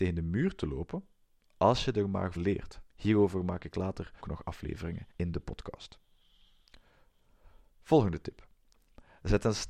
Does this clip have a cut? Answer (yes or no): yes